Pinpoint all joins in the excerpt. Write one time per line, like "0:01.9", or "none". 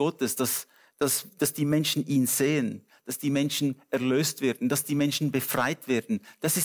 none